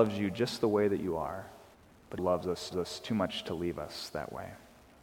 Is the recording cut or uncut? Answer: cut